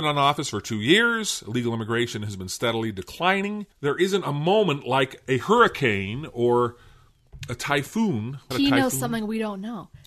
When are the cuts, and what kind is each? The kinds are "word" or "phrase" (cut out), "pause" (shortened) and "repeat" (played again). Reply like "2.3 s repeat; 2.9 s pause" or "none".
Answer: 3.7 s pause; 8.5 s word